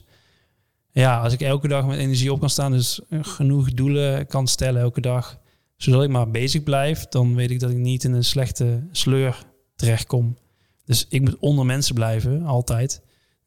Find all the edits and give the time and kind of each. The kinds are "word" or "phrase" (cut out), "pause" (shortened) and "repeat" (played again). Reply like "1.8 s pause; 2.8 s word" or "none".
none

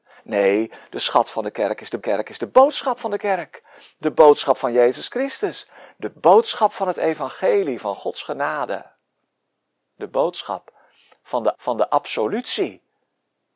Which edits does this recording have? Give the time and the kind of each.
2.0 s repeat; 11.6 s repeat

